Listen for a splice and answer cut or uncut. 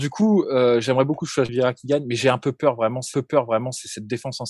cut